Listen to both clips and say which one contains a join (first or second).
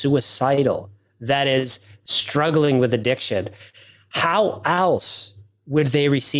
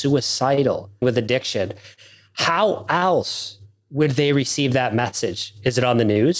second